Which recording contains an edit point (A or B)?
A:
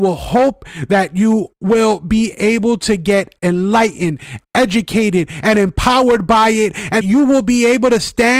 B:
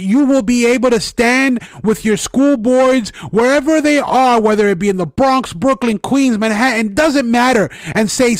A